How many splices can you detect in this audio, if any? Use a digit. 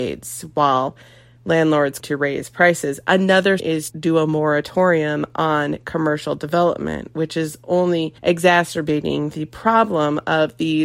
4